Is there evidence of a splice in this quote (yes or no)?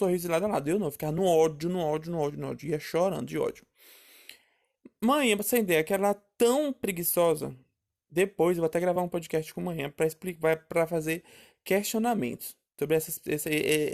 no